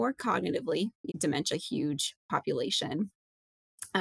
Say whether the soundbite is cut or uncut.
cut